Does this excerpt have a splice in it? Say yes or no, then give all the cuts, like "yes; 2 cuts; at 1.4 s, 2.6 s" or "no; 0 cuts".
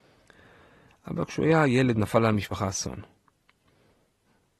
no; 0 cuts